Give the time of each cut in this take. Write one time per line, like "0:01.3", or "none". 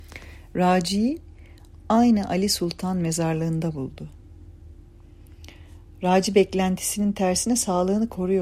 none